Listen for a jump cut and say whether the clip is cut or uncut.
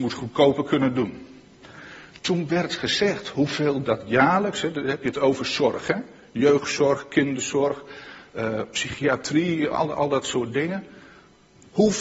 uncut